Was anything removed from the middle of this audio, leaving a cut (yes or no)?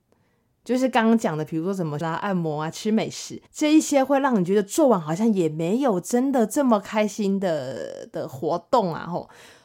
yes